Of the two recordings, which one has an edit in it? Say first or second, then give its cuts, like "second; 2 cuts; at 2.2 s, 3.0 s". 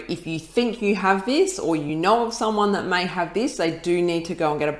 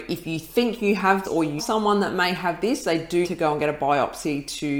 second; 3 cuts; at 1.2 s, 1.6 s, 3.2 s